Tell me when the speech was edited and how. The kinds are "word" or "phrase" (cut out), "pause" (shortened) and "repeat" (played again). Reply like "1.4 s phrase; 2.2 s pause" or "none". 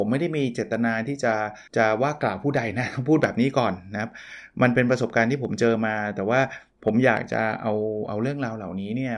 1.7 s pause